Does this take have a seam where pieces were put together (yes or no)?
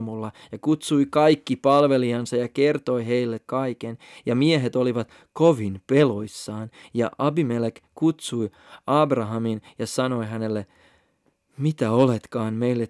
yes